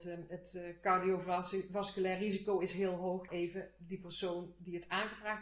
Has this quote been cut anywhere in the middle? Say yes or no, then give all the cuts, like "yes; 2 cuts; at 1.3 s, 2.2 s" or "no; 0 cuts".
yes; 1 cut; at 3.3 s